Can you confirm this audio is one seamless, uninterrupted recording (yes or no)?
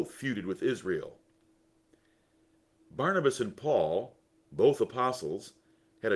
yes